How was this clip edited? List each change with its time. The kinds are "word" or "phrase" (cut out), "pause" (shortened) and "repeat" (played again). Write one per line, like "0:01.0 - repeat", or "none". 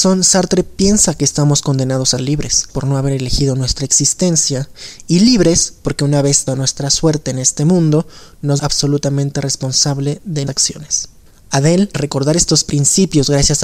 0:02.2 - word
0:02.7 - word
0:06.5 - word
0:08.6 - word
0:10.5 - word
0:11.9 - word